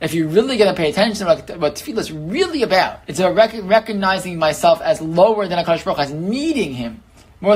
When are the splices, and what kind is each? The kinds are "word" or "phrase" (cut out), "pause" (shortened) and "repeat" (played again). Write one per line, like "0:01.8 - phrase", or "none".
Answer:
0:03.0 - pause